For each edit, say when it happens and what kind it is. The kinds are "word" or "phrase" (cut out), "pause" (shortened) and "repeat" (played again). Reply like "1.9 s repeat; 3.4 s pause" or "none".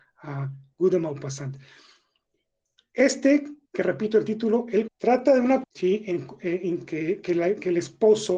4.9 s word; 5.6 s word